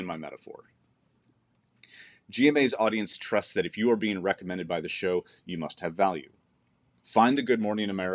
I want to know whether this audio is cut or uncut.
uncut